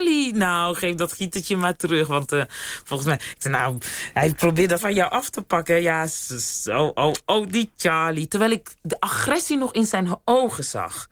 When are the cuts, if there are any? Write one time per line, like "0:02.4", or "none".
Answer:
0:04.8